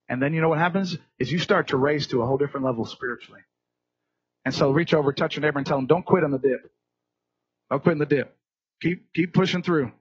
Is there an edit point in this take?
no; 0 cuts

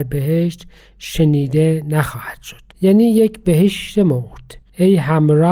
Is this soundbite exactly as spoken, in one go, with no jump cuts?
no; 1 cut; at 2.7 s

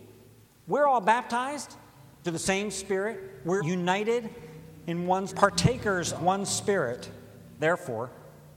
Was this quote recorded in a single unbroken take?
no; 5 cuts; at 2.2 s, 3.6 s, 5.3 s, 6.2 s, 7.6 s

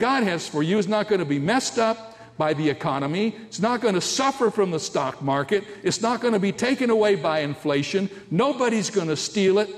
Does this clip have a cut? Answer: no; 0 cuts

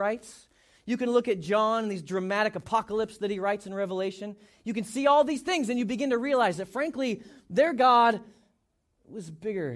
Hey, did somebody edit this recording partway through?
no; 0 cuts

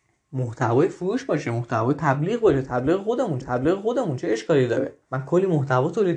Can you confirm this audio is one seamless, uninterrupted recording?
no; 2 cuts; at 3.4 s, 5.0 s

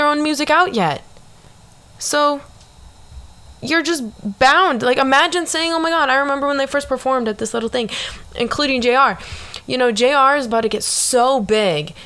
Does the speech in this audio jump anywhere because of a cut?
no; 0 cuts

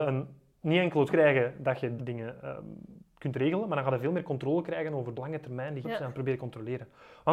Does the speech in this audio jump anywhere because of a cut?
yes; 4 cuts; at 1.1 s, 2.0 s, 5.2 s, 5.8 s

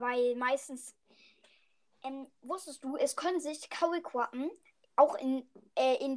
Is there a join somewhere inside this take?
no; 0 cuts

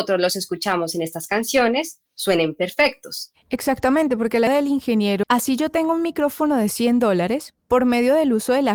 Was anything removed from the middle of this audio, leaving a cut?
yes; 3 cuts; at 2.1 s, 4.5 s, 5.2 s

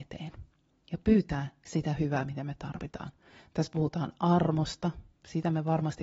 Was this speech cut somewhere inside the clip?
no; 0 cuts

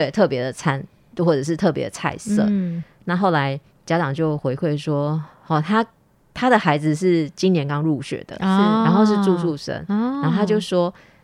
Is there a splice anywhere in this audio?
no; 0 cuts

